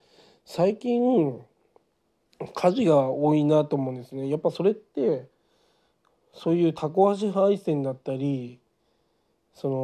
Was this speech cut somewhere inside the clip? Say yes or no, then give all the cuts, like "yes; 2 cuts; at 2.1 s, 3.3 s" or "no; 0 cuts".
no; 0 cuts